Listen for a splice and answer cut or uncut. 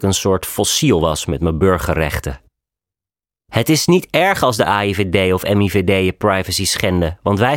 uncut